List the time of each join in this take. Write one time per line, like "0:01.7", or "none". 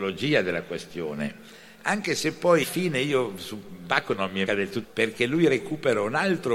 0:02.6
0:04.5
0:04.8